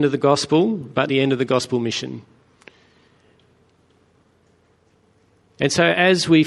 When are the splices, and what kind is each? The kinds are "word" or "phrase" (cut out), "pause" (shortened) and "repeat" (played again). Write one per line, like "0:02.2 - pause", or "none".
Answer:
0:01.1 - word